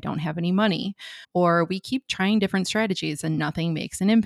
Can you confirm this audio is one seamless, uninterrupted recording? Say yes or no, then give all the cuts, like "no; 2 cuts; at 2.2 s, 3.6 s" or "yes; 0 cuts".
no; 1 cut; at 1.2 s